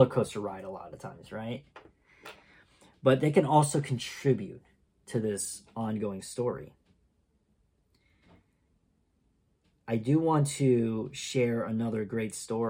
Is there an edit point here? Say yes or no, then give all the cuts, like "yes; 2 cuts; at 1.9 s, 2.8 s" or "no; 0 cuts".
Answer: no; 0 cuts